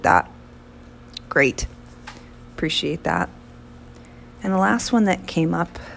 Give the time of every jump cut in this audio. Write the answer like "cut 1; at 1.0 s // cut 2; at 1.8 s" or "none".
cut 1; at 4.4 s